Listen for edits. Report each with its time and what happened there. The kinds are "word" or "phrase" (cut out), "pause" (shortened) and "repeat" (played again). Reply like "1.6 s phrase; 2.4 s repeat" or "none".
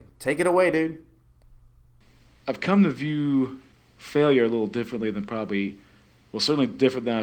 3.7 s pause